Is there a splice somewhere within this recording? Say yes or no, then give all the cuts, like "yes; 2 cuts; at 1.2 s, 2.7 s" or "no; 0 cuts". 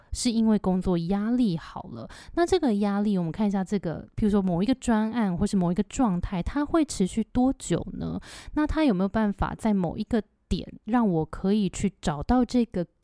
no; 0 cuts